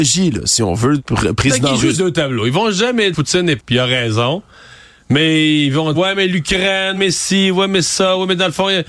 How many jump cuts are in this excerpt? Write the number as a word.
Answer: six